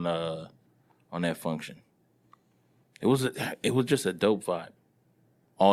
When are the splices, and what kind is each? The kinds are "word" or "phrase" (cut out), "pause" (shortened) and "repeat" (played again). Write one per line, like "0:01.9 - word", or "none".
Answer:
none